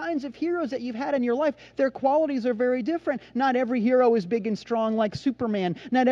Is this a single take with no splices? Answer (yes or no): yes